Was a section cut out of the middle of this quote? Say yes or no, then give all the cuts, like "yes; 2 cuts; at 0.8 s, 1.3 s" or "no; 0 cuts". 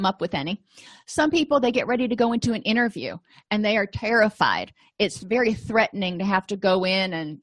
no; 0 cuts